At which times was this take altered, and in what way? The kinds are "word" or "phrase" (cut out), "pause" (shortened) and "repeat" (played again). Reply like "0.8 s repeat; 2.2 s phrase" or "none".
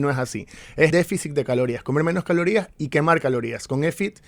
0.9 s word